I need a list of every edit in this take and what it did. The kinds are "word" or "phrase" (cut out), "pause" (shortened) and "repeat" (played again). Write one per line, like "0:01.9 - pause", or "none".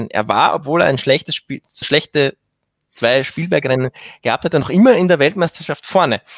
0:01.8 - word